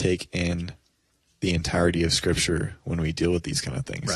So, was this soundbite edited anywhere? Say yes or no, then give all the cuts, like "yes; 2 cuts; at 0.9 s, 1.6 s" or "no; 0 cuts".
no; 0 cuts